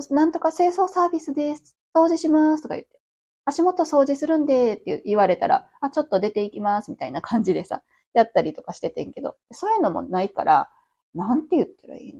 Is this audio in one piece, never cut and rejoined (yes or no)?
no